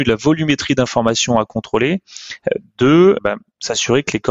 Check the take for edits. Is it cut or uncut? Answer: cut